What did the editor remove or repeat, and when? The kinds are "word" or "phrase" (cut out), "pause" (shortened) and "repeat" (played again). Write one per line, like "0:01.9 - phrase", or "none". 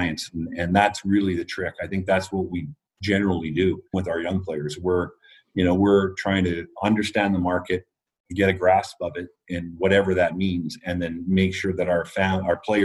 0:03.9 - word